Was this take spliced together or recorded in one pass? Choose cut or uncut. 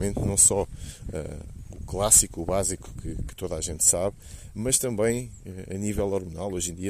uncut